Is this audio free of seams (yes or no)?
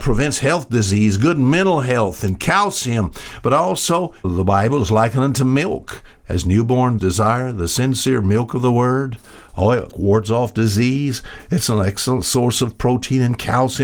no